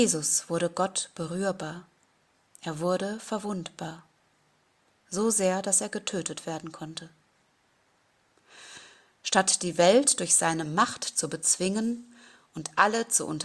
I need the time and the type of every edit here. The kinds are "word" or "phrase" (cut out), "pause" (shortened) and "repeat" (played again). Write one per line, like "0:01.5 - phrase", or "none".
none